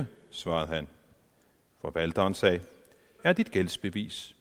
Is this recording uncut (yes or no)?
no